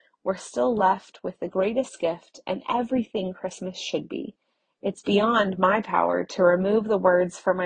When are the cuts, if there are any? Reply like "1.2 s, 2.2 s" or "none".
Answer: none